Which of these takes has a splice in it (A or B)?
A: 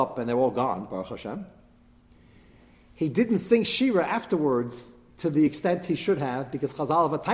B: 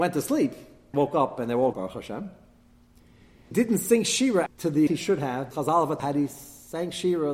B